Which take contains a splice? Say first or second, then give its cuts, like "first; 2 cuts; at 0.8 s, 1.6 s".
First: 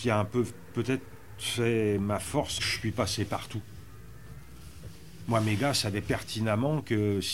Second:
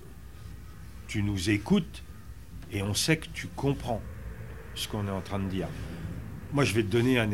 first; 1 cut; at 2.6 s